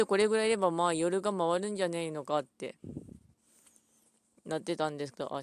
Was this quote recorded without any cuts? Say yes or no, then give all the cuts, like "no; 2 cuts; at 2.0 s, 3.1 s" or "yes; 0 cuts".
yes; 0 cuts